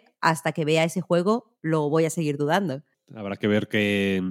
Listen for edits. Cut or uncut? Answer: uncut